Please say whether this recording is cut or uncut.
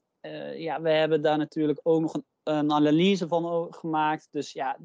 uncut